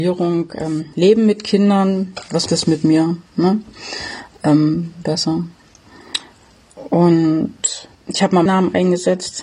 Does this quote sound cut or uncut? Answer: cut